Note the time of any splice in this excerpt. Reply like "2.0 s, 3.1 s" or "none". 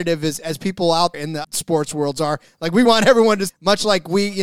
1.1 s, 1.4 s, 2.8 s, 3.5 s